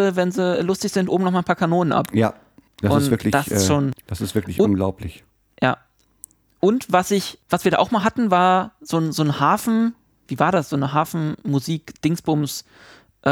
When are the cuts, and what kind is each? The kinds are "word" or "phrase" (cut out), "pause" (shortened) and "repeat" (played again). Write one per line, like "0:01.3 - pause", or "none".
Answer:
none